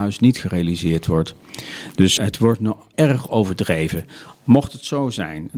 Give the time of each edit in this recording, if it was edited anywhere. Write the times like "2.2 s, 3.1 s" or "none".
2.2 s, 2.9 s

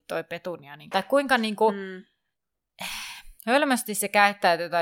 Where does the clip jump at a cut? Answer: 0.9 s, 3.4 s

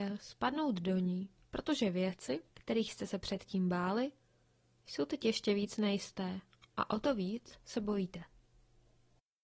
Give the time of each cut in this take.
2.5 s

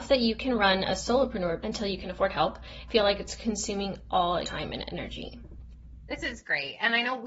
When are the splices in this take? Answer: 1.6 s, 2.9 s, 4.4 s

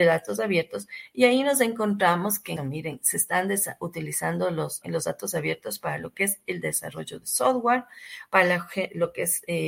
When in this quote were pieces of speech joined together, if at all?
2.6 s, 4.8 s

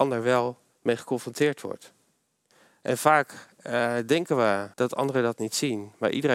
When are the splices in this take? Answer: 4.7 s

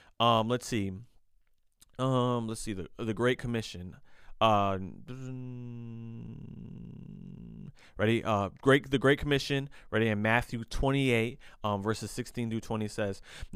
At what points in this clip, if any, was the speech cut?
none

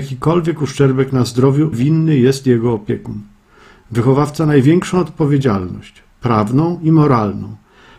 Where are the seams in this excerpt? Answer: 1.7 s

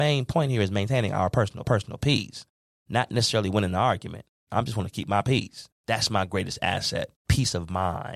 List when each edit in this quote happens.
1.6 s, 5.8 s

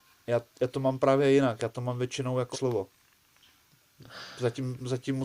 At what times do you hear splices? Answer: 2.5 s

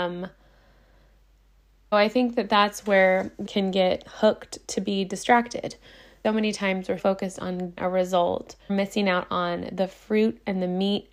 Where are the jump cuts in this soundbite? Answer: 1.9 s, 3.4 s, 6.2 s, 7.0 s, 7.8 s, 8.7 s

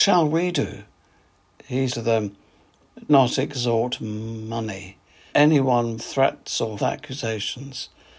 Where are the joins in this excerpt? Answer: 1.9 s, 3.1 s, 5.3 s, 6.0 s, 6.8 s

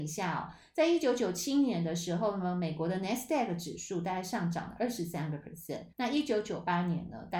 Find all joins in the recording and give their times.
5.9 s

